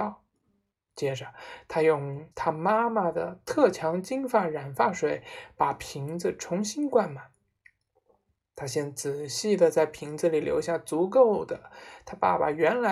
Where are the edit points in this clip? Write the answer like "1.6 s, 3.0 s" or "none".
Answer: 2.3 s